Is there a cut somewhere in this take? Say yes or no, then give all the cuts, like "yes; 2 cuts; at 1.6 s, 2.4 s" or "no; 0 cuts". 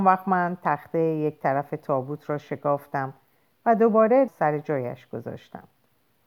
yes; 1 cut; at 4.3 s